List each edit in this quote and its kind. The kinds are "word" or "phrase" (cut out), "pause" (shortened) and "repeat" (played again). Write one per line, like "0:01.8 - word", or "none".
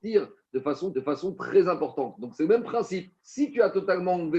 0:00.9 - repeat
0:03.2 - pause